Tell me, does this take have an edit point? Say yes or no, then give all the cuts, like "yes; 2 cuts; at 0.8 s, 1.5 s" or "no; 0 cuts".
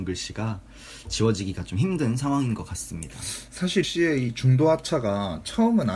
yes; 1 cut; at 3.8 s